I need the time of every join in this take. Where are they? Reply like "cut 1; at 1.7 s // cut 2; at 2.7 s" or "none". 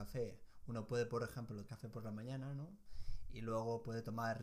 cut 1; at 1.7 s